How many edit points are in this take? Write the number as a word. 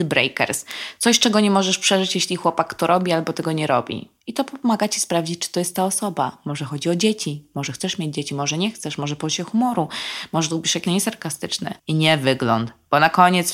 three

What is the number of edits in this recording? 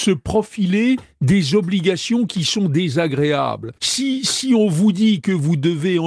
one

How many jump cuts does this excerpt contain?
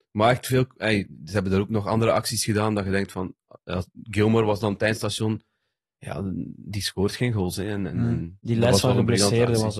zero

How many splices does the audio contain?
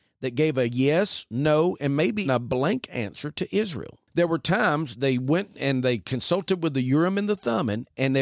two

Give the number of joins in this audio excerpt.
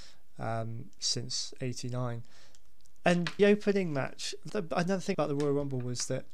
three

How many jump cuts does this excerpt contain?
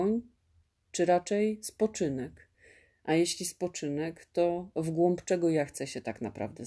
zero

